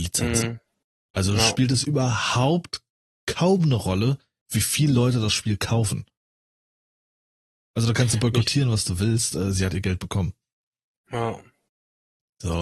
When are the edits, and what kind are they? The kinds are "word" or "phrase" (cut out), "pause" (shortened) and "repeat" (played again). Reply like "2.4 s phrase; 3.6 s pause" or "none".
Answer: none